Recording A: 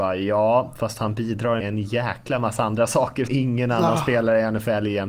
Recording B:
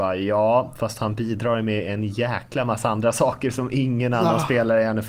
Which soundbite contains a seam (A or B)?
A